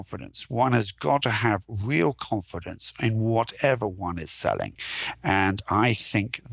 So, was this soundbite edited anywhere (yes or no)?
no